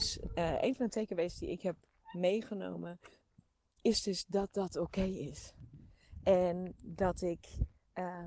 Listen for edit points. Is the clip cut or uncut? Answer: uncut